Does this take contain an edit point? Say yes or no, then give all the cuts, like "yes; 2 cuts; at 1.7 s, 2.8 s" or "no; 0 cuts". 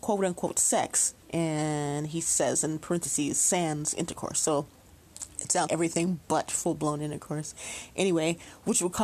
yes; 2 cuts; at 1.2 s, 5.7 s